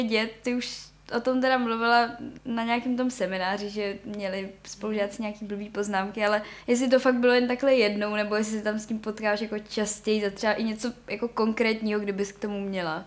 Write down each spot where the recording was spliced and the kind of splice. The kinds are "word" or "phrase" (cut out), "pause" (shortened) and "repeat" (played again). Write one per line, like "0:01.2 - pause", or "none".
0:02.4 - pause
0:06.6 - pause